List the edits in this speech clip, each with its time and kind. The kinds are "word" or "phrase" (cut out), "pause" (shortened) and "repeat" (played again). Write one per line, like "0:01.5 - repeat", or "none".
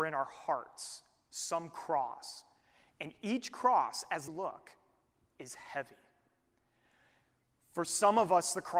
0:04.3 - phrase